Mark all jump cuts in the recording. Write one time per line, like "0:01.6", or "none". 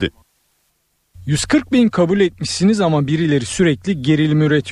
0:01.9